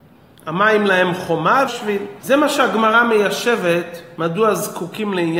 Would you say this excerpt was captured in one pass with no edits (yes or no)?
no